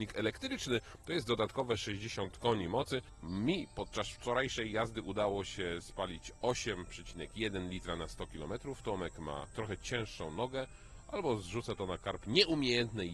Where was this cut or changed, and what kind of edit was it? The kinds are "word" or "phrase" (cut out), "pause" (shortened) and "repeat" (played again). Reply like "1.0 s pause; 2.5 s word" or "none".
none

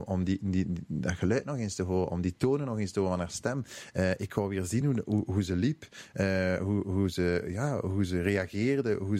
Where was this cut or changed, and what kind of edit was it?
none

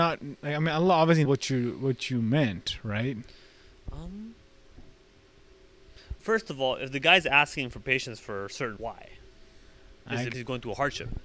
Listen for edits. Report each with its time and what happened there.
1.2 s word; 6.2 s word; 8.8 s word; 10.3 s word

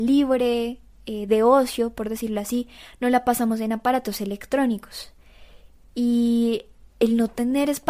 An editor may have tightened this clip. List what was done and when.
none

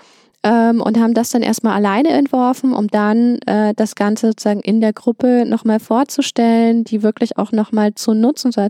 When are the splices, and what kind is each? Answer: none

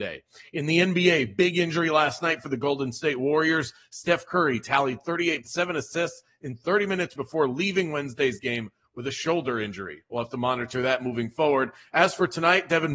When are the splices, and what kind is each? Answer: 5.4 s phrase; 7.2 s word

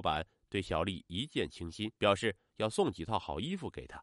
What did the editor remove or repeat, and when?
2.0 s pause

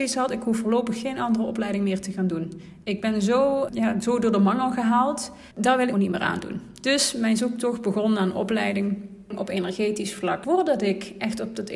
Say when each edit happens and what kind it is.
3.7 s word; 5.5 s pause; 5.9 s phrase

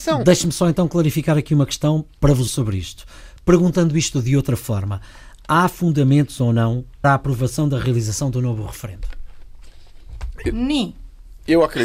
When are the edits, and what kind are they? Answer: 2.5 s word; 7.0 s word

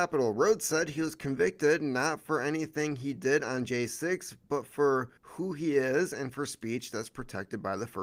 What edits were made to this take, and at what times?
5.2 s pause

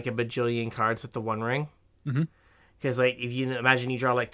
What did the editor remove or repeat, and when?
1.9 s pause

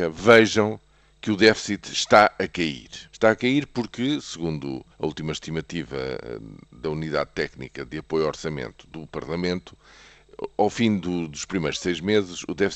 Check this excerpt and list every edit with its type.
3.1 s pause; 4.9 s pause

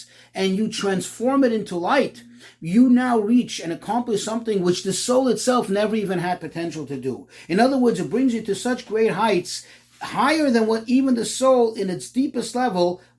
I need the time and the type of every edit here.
none

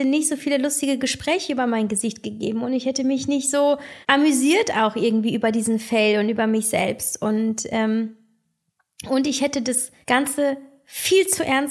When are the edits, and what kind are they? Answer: 4.0 s pause; 10.0 s pause

